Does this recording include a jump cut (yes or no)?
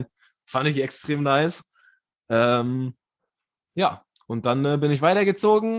no